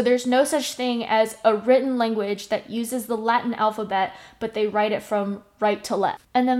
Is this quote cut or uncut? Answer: uncut